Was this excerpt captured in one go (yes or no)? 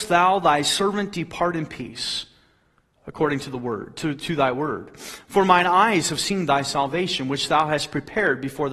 yes